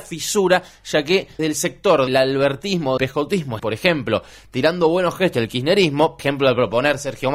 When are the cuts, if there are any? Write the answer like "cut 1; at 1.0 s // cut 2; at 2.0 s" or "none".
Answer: cut 1; at 1.4 s // cut 2; at 2.1 s // cut 3; at 3.0 s // cut 4; at 3.6 s // cut 5; at 5.3 s // cut 6; at 6.2 s

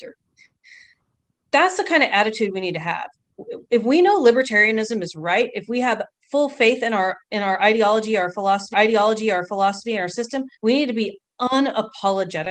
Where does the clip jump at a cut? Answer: cut 1; at 8.7 s // cut 2; at 10.6 s

